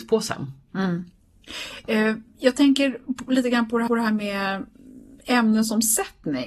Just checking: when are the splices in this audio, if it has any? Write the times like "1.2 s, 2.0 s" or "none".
3.9 s, 5.2 s